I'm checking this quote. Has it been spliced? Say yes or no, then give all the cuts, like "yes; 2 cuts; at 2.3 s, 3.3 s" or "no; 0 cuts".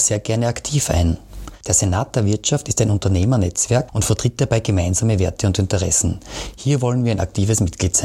no; 0 cuts